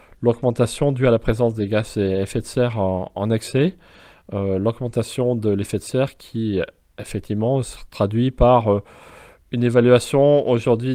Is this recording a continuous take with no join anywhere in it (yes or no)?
yes